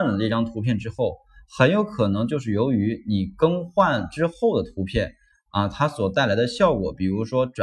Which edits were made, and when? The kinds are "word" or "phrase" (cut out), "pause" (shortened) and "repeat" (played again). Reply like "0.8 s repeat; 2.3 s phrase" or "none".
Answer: none